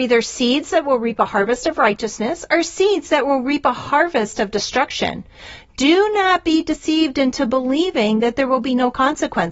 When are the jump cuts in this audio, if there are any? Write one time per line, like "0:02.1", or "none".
none